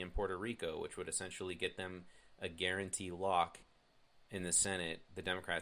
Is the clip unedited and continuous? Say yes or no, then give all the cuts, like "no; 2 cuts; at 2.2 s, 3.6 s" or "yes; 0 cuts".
yes; 0 cuts